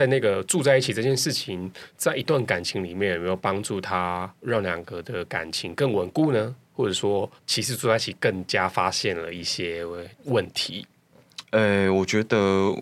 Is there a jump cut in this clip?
yes; 3 cuts; at 4.3 s, 7.4 s, 10.2 s

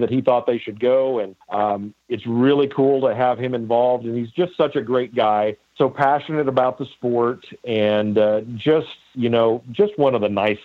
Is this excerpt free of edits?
no; 3 cuts; at 1.4 s, 5.7 s, 9.0 s

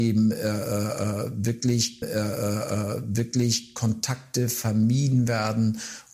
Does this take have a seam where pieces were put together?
yes; 1 cut; at 2.0 s

